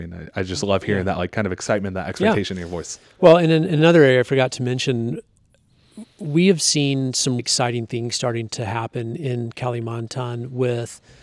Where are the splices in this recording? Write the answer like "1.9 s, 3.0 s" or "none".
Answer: 7.4 s